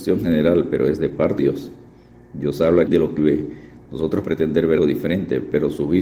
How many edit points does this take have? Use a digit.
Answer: 5